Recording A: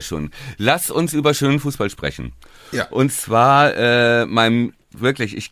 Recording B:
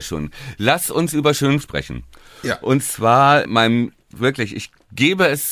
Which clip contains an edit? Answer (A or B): B